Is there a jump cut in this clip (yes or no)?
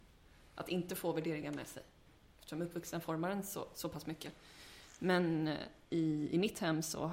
no